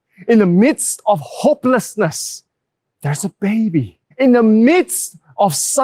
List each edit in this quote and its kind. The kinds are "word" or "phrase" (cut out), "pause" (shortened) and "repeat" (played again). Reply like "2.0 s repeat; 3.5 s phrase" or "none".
4.1 s pause